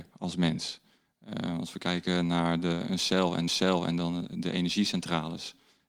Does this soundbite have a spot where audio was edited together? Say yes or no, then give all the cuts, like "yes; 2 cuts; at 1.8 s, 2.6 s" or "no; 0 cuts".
yes; 1 cut; at 3.5 s